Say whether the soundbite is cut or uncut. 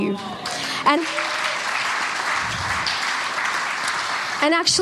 cut